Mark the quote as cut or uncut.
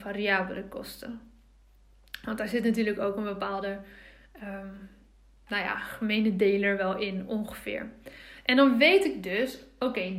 uncut